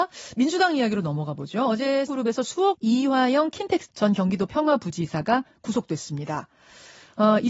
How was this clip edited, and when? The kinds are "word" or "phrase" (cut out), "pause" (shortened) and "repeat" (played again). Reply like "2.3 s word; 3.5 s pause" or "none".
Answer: 2.1 s word; 2.7 s phrase; 3.9 s word